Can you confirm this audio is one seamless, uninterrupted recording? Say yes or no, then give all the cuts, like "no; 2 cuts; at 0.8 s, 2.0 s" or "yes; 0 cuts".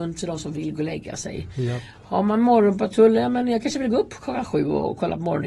yes; 0 cuts